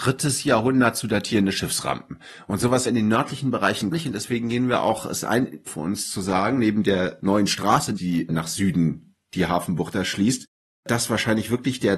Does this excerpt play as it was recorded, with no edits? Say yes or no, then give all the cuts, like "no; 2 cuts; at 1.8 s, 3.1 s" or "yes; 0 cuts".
no; 4 cuts; at 2.9 s, 3.9 s, 5.7 s, 8.0 s